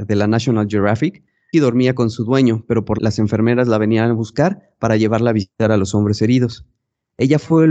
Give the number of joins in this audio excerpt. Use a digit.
2